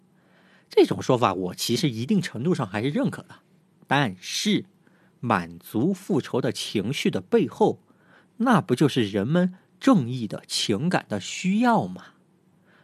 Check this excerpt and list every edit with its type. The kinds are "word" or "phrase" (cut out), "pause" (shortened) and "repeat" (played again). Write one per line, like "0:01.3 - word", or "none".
none